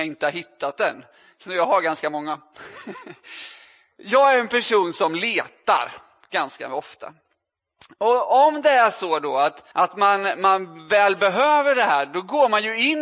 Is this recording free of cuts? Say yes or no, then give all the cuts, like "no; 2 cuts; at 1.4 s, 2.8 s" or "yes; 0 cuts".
no; 1 cut; at 9.7 s